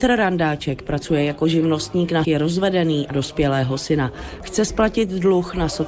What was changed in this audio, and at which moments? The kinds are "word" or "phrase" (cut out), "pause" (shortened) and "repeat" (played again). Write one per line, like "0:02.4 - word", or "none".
0:02.2 - word
0:03.1 - word